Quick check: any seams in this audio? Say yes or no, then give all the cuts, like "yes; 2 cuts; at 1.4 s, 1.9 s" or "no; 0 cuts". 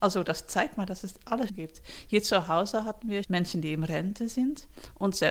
yes; 2 cuts; at 1.5 s, 3.2 s